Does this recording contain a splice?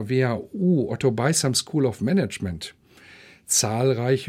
no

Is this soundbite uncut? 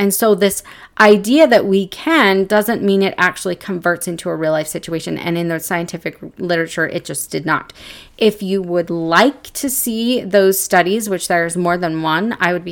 yes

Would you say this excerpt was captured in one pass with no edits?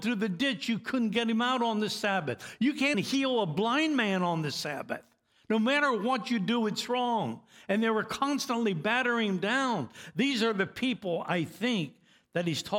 no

